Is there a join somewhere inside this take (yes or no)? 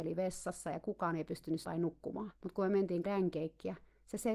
yes